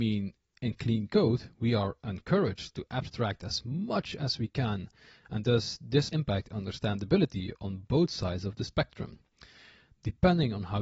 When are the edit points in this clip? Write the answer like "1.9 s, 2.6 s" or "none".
6.1 s